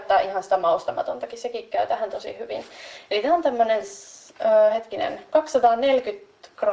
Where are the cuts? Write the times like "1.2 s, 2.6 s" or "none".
none